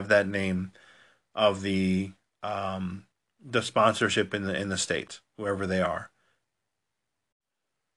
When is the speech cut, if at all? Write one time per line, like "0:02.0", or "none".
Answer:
0:03.1